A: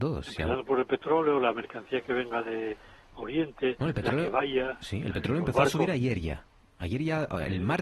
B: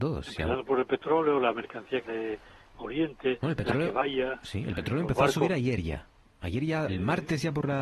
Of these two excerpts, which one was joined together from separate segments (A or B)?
B